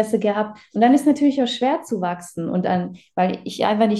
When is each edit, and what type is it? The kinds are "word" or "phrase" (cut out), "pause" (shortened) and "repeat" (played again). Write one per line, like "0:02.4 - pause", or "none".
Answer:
none